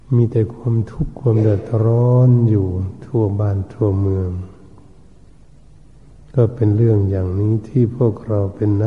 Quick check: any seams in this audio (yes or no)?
no